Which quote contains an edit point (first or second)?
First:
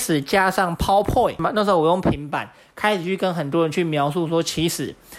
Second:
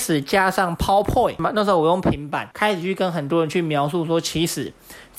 second